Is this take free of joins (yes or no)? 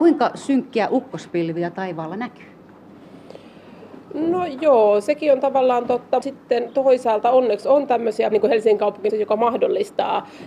no